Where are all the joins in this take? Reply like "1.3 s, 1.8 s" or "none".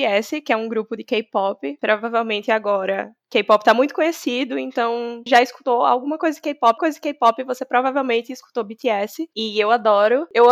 5.3 s, 6.8 s